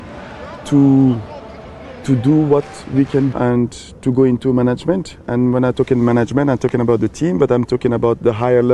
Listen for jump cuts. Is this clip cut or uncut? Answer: cut